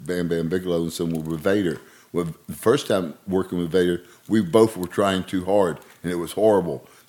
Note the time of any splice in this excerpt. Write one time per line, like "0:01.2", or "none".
none